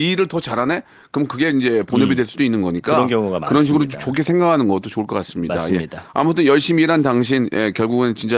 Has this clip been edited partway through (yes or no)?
no